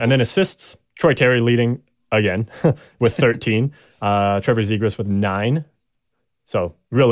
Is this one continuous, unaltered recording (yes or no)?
yes